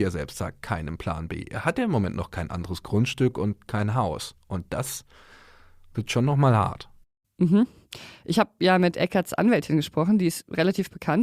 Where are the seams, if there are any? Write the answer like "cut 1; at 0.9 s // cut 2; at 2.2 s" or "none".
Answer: none